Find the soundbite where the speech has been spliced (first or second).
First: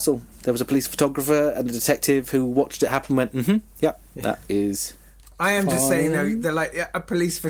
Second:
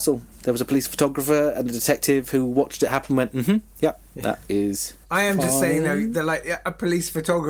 second